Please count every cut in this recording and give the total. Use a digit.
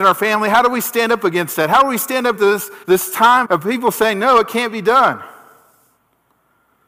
3